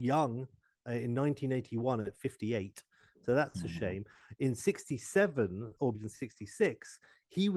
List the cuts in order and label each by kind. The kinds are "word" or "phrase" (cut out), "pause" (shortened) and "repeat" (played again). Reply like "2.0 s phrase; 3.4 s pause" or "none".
5.9 s word